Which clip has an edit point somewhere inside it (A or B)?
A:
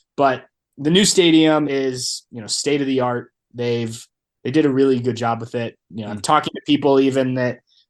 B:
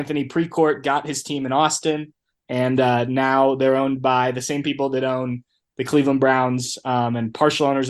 A